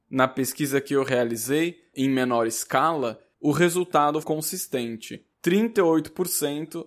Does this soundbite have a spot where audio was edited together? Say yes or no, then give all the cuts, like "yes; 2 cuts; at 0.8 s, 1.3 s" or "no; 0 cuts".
yes; 3 cuts; at 1.9 s, 4.2 s, 5.3 s